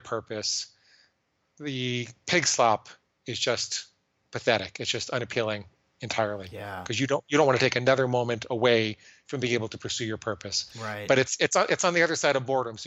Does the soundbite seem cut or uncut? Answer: uncut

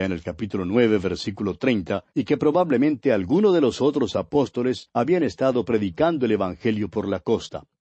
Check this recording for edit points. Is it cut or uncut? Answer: uncut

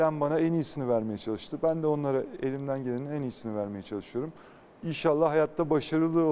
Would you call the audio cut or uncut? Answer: uncut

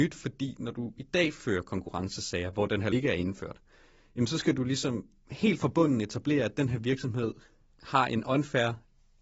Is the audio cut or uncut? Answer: cut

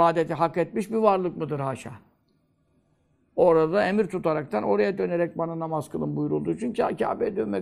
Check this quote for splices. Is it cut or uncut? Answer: uncut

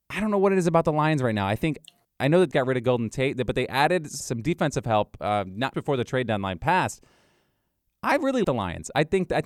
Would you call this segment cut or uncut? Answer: cut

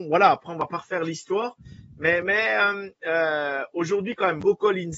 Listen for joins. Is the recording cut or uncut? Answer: uncut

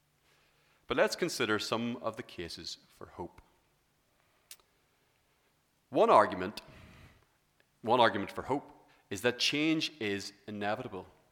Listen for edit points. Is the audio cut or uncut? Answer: uncut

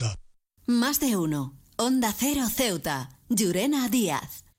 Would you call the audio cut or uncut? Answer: uncut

